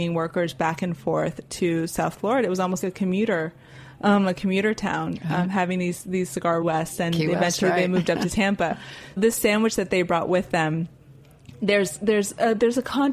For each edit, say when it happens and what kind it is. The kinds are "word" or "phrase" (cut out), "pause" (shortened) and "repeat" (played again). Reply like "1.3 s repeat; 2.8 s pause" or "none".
2.8 s word; 6.6 s phrase; 9.2 s word